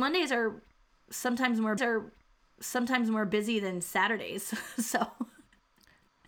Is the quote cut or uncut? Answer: cut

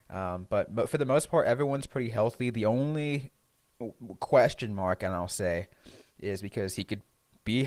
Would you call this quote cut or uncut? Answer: uncut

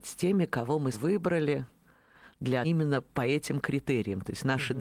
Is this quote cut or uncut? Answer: cut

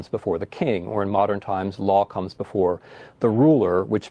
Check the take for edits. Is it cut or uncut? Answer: uncut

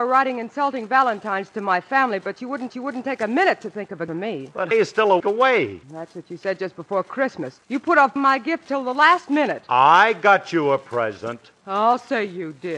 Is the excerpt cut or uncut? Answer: cut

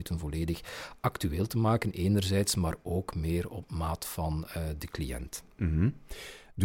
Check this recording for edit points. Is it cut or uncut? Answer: uncut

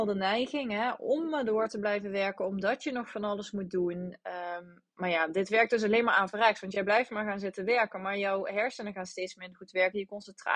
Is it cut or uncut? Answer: uncut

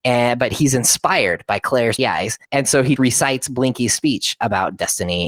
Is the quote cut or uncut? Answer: cut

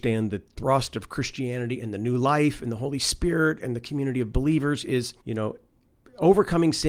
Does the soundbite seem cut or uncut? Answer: cut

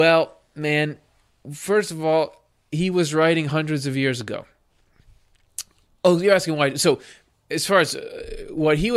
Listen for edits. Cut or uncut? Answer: uncut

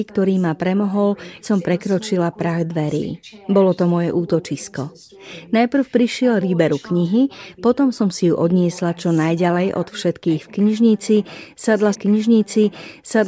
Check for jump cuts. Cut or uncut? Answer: cut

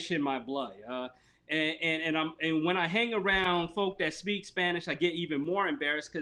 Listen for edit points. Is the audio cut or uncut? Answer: uncut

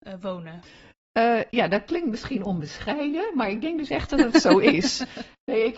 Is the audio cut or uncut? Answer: uncut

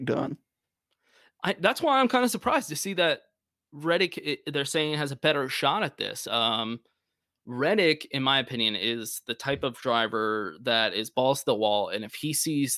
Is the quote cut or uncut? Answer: uncut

